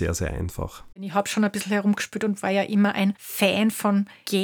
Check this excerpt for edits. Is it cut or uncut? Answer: uncut